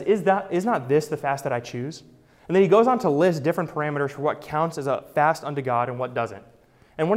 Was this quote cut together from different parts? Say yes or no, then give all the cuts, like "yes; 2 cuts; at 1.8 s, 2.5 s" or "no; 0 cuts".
no; 0 cuts